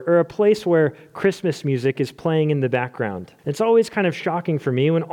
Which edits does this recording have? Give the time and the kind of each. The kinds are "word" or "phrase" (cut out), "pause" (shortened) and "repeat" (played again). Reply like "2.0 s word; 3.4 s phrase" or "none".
3.4 s pause